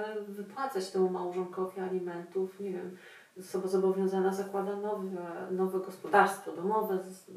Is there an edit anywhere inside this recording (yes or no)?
no